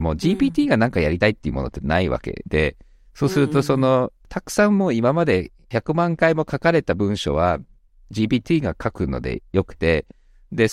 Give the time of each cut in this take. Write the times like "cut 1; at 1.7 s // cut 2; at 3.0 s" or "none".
none